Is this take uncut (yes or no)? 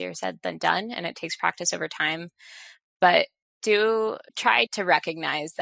no